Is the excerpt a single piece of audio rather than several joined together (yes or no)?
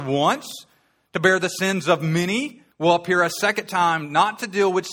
no